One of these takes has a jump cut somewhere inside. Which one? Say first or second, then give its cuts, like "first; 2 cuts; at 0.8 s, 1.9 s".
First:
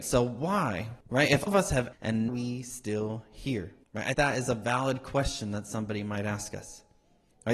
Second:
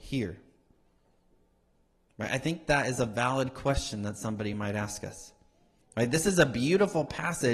first; 6 cuts; at 1.0 s, 1.5 s, 1.9 s, 2.3 s, 3.8 s, 4.1 s